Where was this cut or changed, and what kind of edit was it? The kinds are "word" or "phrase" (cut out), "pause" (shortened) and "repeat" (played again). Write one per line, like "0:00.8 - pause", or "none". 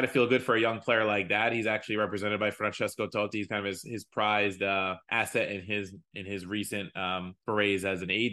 0:05.0 - pause
0:07.4 - pause